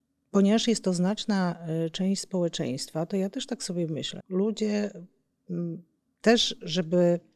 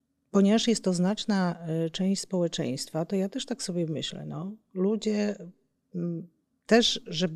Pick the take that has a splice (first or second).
first